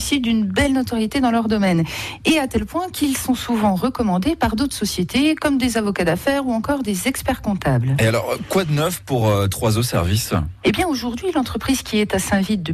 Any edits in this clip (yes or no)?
no